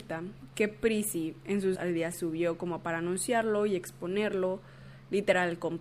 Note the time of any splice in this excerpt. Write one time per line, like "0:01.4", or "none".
0:01.8
0:02.1